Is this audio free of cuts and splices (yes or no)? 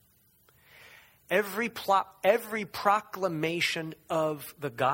yes